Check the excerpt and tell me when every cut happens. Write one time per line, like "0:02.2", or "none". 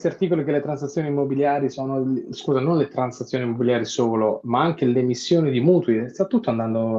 none